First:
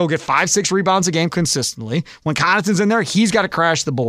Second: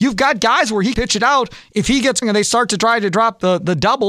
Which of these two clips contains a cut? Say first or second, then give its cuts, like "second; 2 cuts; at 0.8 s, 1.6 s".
second; 2 cuts; at 0.9 s, 2.2 s